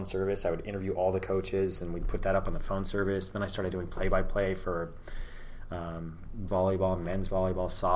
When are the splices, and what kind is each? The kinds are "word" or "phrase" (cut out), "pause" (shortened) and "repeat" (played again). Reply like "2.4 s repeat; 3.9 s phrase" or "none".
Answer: 6.5 s word